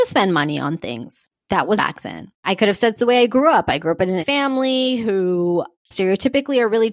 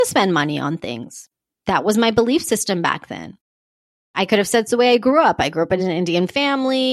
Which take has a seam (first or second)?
first